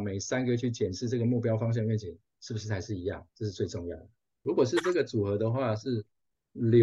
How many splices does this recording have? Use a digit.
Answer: 1